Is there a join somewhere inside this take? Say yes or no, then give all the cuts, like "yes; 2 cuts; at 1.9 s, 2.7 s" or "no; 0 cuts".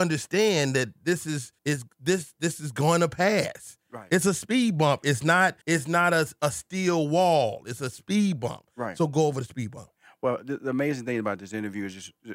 yes; 2 cuts; at 1.6 s, 5.6 s